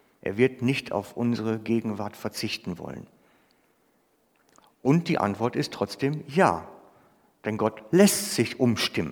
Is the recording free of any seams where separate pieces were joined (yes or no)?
yes